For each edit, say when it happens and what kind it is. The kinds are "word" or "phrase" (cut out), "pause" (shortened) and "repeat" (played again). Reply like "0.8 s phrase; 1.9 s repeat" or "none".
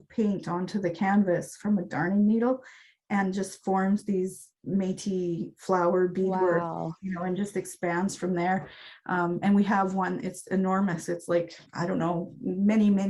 11.7 s pause